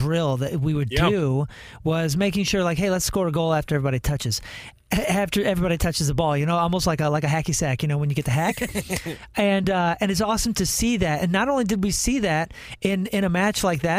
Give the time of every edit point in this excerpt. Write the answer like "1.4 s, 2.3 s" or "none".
none